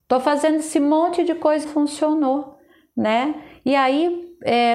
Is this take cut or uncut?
cut